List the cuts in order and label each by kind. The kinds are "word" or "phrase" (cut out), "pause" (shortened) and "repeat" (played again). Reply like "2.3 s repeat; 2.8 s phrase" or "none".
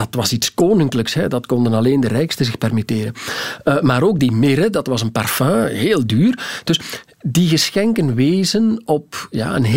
none